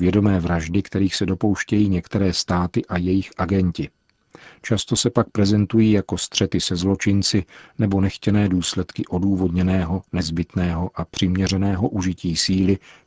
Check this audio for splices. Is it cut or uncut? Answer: uncut